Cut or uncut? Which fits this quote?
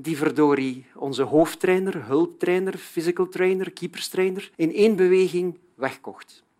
cut